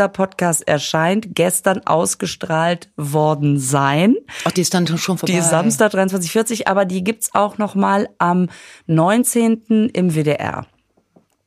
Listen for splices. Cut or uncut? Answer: uncut